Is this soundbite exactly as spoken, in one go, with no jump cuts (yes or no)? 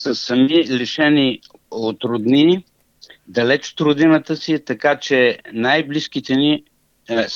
yes